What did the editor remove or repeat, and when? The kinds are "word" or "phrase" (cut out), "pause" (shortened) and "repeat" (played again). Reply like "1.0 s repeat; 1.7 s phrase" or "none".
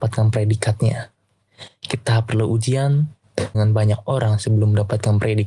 3.5 s word

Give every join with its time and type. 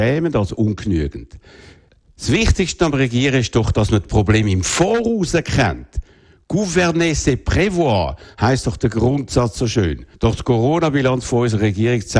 1.9 s pause; 10.1 s pause

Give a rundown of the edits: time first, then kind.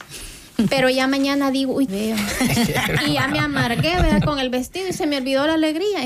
1.9 s phrase

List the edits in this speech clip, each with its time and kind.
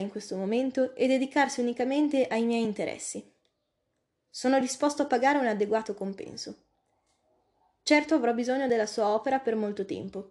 none

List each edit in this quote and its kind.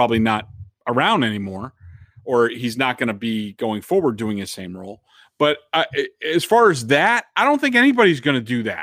none

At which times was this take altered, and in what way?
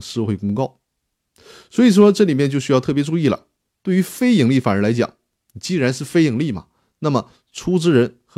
none

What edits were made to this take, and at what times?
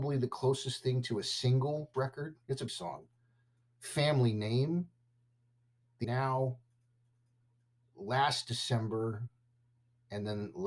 1.9 s phrase; 2.7 s word; 6.0 s word

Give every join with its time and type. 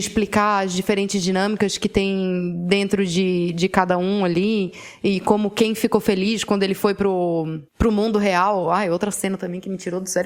7.7 s pause

